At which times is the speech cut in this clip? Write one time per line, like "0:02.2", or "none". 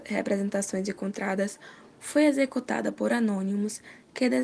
none